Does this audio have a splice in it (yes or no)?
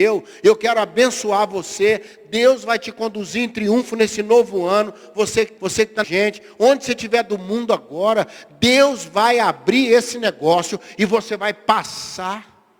yes